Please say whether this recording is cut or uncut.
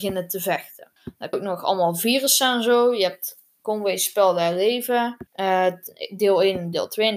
cut